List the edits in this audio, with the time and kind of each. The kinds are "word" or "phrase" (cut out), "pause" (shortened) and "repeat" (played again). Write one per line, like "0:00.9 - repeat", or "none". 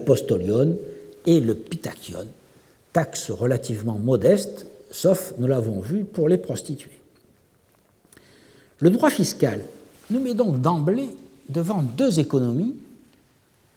none